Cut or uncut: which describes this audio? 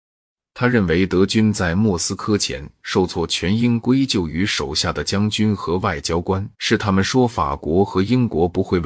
cut